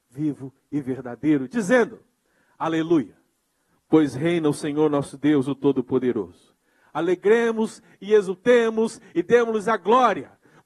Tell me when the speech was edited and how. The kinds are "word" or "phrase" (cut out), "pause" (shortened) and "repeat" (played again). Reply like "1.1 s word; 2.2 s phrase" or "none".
none